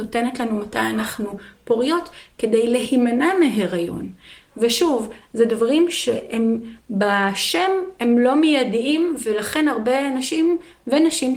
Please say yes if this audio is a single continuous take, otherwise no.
yes